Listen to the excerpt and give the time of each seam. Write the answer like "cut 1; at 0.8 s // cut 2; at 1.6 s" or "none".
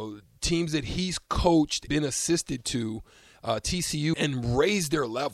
cut 1; at 1.9 s // cut 2; at 4.1 s